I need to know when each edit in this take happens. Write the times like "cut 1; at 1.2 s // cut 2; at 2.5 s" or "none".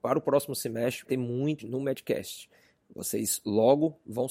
cut 1; at 1.1 s // cut 2; at 1.6 s